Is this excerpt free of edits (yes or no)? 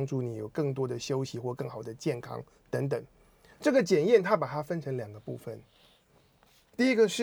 yes